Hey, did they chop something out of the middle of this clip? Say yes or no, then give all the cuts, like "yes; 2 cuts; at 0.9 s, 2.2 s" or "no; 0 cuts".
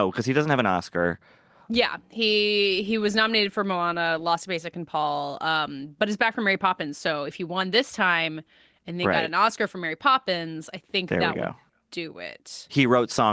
no; 0 cuts